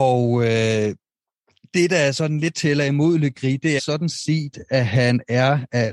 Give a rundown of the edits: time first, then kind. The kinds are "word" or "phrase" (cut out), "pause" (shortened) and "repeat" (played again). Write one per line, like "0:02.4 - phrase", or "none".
0:03.8 - word